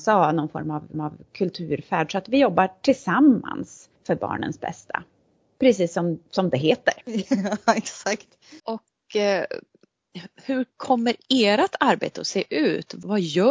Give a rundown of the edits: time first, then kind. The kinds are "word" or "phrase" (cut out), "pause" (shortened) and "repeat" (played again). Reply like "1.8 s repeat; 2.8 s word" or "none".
0.9 s repeat; 4.0 s pause; 7.0 s pause; 8.6 s pause